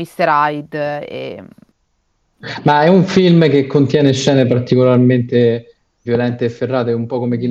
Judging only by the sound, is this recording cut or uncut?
cut